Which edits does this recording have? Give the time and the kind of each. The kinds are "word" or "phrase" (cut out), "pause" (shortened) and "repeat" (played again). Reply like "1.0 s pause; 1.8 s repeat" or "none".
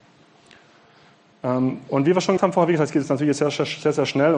2.4 s word